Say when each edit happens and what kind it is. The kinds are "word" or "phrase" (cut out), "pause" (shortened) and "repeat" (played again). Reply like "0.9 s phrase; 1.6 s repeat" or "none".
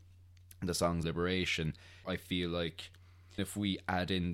1.0 s word; 2.0 s word; 3.4 s word